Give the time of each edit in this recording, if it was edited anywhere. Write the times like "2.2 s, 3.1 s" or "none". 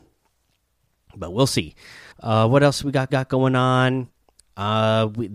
2.1 s, 3.1 s